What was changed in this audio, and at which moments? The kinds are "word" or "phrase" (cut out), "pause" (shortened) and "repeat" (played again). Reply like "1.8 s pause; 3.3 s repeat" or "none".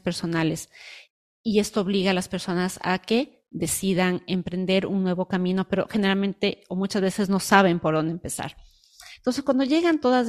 none